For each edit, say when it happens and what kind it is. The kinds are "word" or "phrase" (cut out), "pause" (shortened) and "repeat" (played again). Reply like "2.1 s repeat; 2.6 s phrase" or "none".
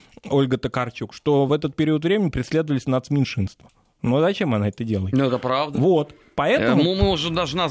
none

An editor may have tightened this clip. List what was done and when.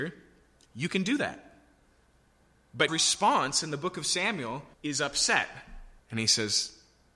2.9 s word; 4.7 s pause; 6.0 s pause

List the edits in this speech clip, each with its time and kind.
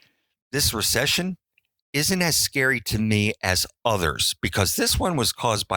none

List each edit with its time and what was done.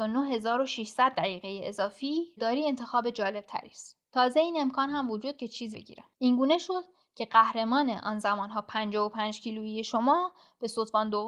2.4 s word; 5.4 s word; 5.7 s word

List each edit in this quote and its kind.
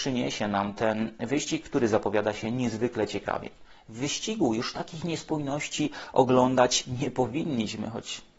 none

